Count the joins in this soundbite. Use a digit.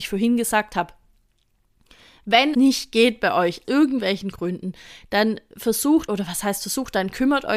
3